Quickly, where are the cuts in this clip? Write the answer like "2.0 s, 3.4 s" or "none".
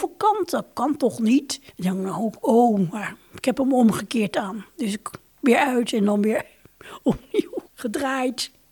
1.7 s, 7.7 s